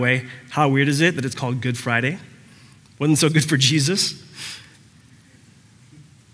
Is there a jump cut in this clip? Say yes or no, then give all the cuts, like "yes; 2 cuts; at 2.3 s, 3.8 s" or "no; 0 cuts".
no; 0 cuts